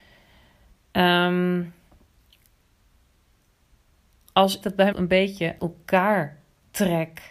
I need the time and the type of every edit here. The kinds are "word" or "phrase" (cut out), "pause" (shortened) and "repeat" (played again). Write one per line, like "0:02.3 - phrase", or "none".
0:04.6 - word
0:04.9 - word
0:05.6 - word